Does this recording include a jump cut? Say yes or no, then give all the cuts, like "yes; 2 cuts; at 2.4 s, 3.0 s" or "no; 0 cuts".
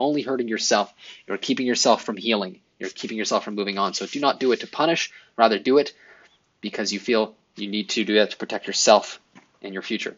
no; 0 cuts